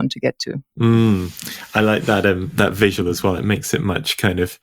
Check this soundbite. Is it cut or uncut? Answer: uncut